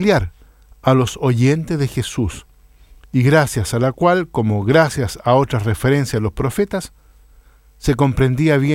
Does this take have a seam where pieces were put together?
no; 0 cuts

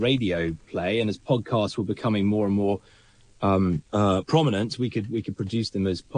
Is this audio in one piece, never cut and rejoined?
no; 1 cut; at 3.9 s

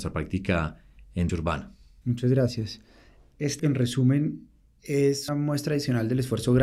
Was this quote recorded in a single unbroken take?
no; 3 cuts; at 1.3 s, 3.6 s, 5.3 s

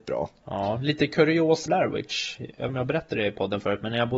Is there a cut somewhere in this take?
yes; 2 cuts; at 1.7 s, 2.7 s

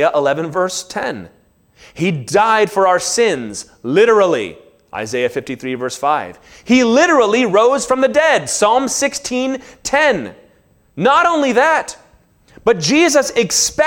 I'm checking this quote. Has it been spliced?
no; 0 cuts

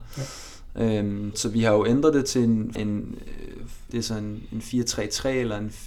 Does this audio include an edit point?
yes; 3 cuts; at 1.3 s, 2.8 s, 3.9 s

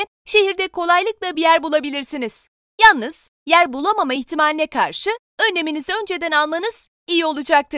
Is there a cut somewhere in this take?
no; 0 cuts

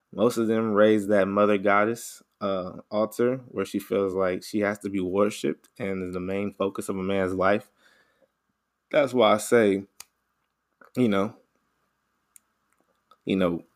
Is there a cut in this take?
no; 0 cuts

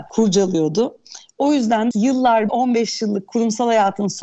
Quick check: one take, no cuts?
no; 2 cuts; at 1.9 s, 2.5 s

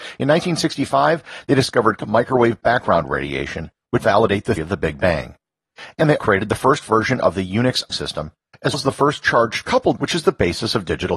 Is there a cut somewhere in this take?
yes; 7 cuts; at 2.0 s, 4.0 s, 4.6 s, 6.2 s, 7.9 s, 8.7 s, 10.0 s

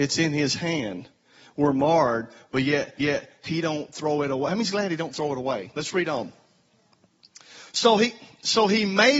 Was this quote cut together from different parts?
yes; 1 cut; at 3.0 s

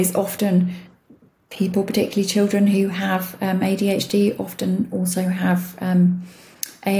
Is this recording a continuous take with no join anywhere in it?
yes; 0 cuts

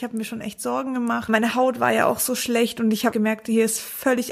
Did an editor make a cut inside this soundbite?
yes; 2 cuts; at 1.3 s, 3.1 s

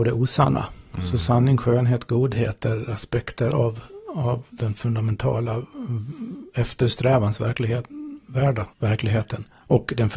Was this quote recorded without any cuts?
no; 1 cut; at 8.7 s

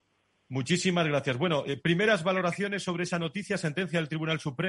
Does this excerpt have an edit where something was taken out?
no; 0 cuts

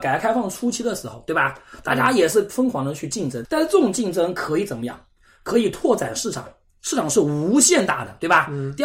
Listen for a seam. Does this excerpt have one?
yes; 1 cut; at 3.4 s

